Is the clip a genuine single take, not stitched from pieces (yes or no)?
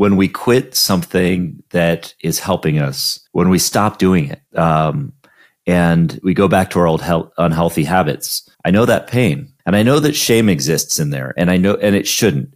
no